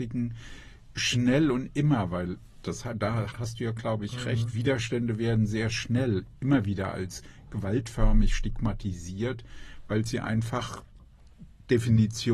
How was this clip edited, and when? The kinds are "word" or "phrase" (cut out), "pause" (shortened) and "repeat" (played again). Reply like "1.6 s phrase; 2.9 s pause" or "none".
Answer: 3.3 s word